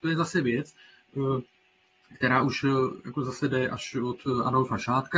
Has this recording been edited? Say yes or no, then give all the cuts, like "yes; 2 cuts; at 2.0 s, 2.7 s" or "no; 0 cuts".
no; 0 cuts